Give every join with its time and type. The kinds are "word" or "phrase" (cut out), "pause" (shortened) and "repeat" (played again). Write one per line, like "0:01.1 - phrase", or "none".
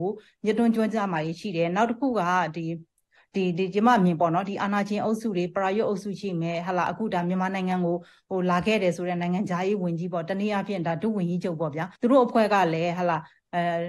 0:12.0 - pause